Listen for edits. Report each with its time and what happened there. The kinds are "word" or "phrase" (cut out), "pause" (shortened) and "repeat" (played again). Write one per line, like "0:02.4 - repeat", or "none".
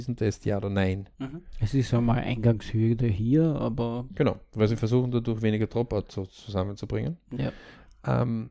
0:01.1 - pause